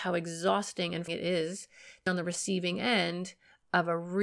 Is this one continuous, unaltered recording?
no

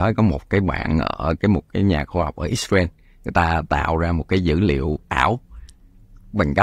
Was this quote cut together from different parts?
no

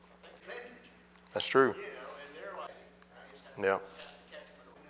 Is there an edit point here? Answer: no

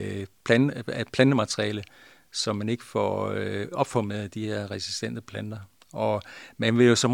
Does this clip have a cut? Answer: no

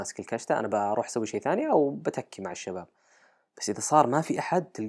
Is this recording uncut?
yes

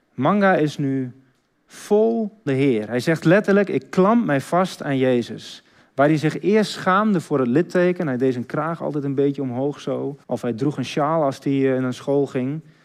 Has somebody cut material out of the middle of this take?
yes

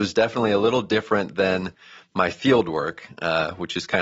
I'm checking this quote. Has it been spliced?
no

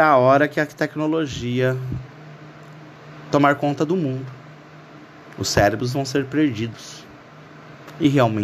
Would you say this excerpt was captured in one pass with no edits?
yes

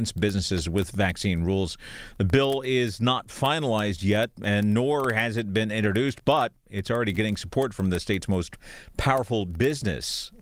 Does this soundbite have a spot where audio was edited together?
no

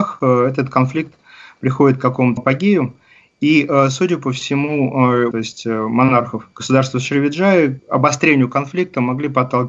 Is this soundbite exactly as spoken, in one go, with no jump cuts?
no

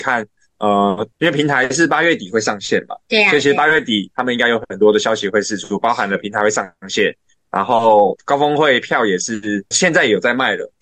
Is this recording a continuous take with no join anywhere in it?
no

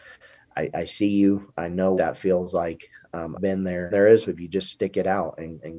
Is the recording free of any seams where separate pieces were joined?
no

